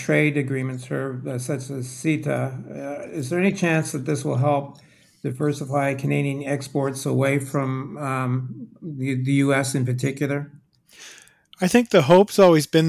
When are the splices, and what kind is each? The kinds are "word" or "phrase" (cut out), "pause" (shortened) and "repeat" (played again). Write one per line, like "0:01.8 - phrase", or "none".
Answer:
none

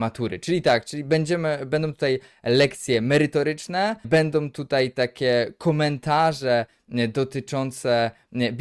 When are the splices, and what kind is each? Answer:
0:04.0 - word

